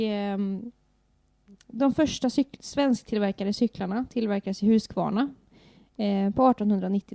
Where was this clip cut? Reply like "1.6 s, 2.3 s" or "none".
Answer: none